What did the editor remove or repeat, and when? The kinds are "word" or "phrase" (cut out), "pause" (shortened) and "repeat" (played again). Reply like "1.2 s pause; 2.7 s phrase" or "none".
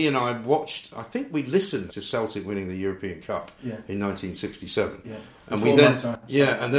1.9 s word